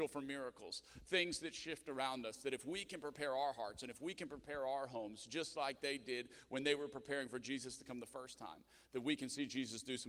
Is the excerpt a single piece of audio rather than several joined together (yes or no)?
yes